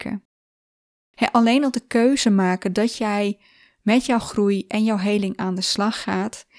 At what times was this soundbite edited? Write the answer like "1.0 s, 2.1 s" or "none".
none